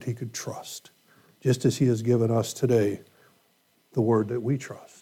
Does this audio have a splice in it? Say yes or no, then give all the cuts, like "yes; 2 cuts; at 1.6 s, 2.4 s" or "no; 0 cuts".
no; 0 cuts